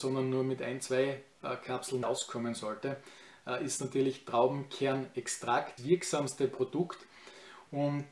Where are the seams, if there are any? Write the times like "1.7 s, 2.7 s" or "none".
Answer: 2.0 s, 5.8 s